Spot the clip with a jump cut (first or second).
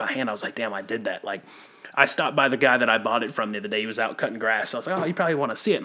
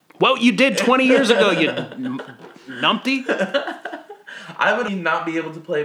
second